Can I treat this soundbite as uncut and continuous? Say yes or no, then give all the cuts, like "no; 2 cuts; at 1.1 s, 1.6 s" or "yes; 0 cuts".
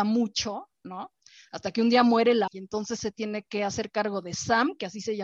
no; 2 cuts; at 2.5 s, 3.0 s